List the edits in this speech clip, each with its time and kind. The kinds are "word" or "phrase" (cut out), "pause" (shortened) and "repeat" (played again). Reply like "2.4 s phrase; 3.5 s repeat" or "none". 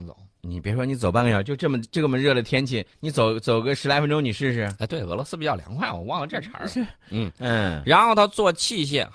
2.9 s pause